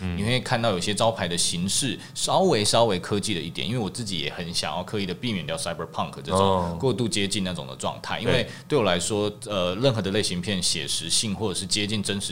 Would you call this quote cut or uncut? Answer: uncut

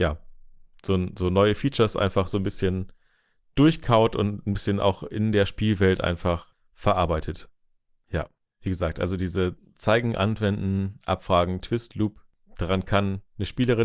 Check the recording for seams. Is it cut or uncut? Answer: uncut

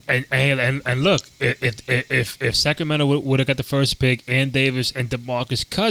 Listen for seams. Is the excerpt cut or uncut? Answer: uncut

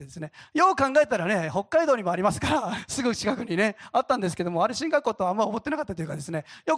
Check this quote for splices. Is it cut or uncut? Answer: cut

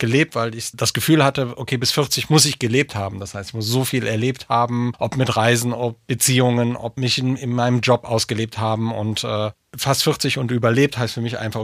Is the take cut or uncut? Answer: uncut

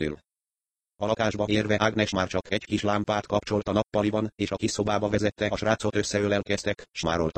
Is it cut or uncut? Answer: uncut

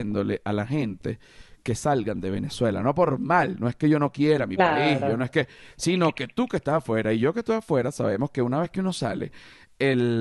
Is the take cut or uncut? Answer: uncut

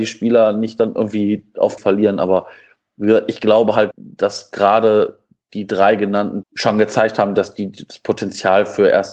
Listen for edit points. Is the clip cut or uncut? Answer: cut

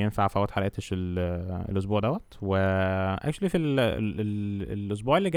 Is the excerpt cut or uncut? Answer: uncut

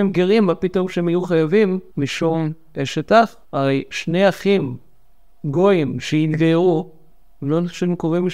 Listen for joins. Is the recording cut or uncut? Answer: cut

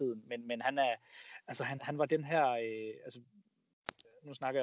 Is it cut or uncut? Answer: cut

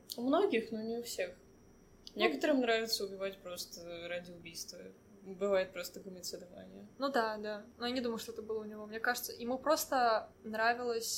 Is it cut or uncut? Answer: uncut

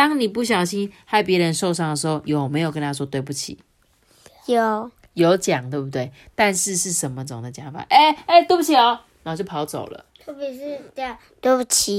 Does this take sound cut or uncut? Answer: uncut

